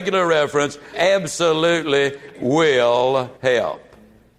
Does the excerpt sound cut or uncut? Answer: cut